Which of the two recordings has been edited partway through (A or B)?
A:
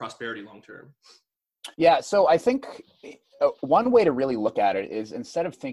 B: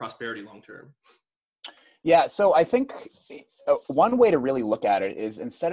A